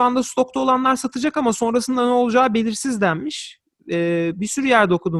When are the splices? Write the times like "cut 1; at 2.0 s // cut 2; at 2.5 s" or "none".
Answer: none